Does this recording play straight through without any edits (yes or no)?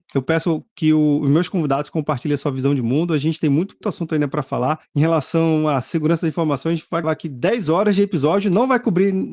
no